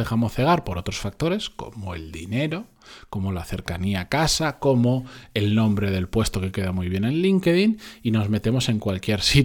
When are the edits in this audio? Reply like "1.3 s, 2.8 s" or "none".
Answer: none